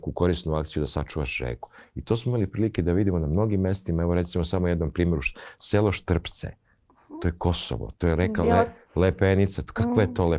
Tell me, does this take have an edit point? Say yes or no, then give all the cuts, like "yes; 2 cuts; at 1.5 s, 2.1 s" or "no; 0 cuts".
no; 0 cuts